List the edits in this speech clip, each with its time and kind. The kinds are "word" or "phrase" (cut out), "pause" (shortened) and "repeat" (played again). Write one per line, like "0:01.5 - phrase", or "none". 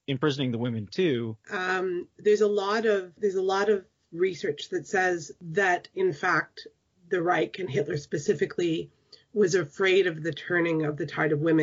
0:01.4 - pause
0:03.2 - word